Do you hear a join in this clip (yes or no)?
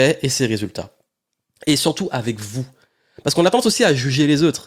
no